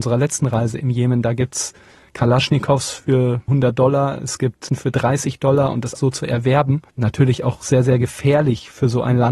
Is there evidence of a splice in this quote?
yes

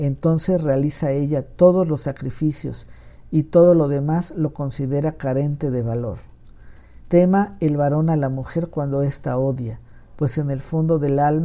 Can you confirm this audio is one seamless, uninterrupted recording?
no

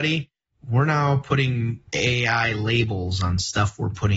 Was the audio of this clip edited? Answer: yes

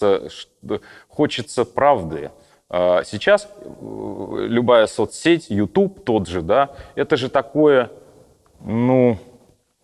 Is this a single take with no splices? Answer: yes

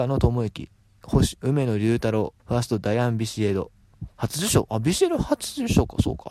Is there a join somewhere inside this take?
yes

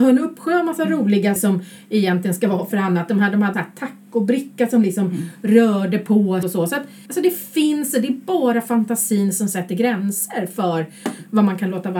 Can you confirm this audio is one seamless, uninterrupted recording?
no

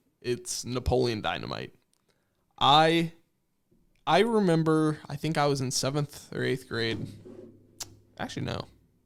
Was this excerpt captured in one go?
yes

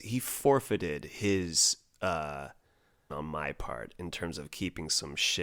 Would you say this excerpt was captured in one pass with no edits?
no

